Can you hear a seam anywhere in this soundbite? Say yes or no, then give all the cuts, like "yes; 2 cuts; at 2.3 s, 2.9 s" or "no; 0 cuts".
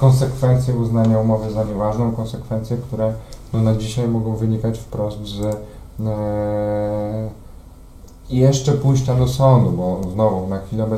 no; 0 cuts